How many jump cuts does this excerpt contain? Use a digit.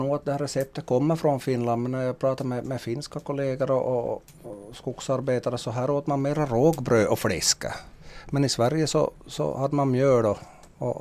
0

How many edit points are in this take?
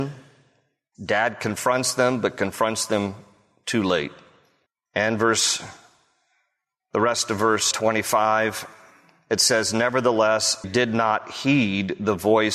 3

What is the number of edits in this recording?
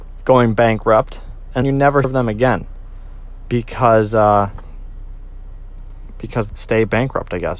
3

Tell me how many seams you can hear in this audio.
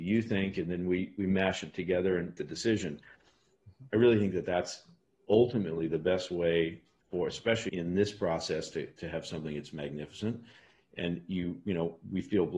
2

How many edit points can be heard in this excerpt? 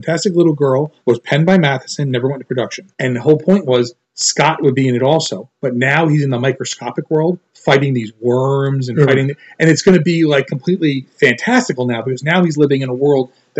4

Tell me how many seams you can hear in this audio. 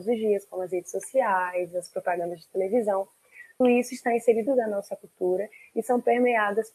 2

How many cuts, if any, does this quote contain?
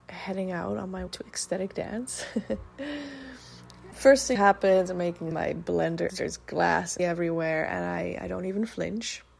6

